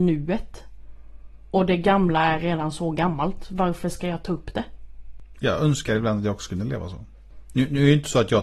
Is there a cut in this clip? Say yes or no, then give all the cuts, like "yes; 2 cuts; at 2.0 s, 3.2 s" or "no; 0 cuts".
no; 0 cuts